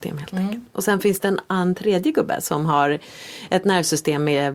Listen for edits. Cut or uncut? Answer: uncut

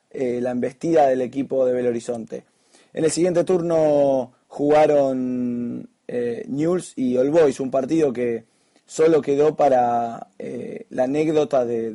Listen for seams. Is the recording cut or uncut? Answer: uncut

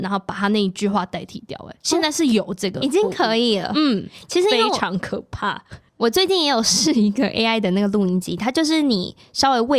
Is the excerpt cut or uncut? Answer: uncut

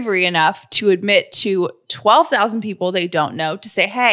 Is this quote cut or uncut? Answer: uncut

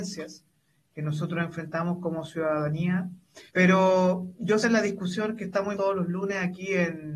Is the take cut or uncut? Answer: cut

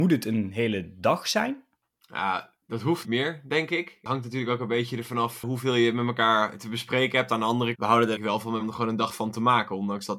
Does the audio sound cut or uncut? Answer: cut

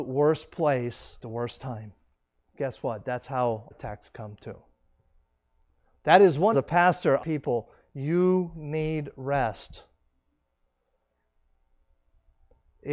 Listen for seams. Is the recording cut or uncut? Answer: cut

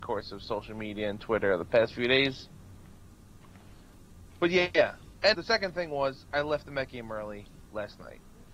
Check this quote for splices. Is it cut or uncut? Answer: cut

